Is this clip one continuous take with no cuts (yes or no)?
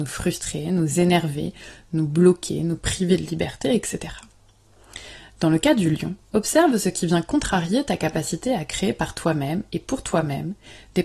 no